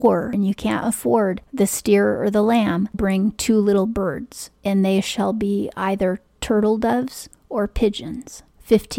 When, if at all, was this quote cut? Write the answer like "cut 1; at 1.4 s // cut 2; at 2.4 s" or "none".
cut 1; at 2.9 s // cut 2; at 4.6 s